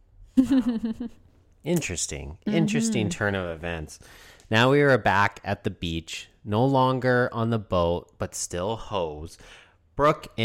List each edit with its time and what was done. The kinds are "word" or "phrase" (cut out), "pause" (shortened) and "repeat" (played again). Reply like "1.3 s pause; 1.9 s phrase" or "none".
none